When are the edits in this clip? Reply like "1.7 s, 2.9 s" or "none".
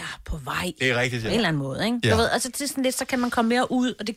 none